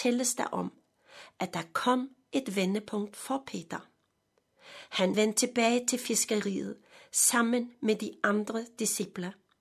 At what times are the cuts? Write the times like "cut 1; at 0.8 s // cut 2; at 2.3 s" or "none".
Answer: cut 1; at 5.1 s